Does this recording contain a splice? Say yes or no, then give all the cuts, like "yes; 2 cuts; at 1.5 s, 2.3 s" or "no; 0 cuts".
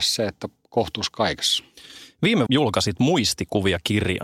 yes; 1 cut; at 2.5 s